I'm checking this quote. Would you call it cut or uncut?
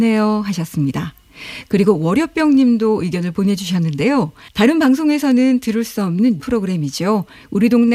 cut